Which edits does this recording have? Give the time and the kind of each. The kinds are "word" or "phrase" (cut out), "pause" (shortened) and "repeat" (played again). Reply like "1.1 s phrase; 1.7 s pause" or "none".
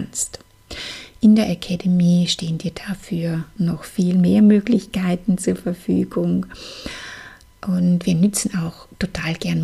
none